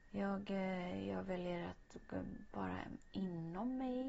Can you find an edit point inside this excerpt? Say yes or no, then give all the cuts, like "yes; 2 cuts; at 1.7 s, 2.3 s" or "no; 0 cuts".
no; 0 cuts